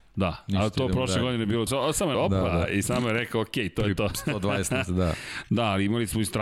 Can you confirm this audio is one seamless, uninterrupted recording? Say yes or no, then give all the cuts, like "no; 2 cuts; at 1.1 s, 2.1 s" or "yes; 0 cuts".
no; 4 cuts; at 1.7 s, 2.1 s, 2.8 s, 4.8 s